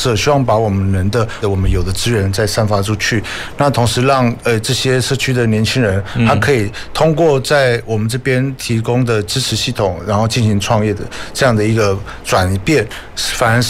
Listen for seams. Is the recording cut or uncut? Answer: cut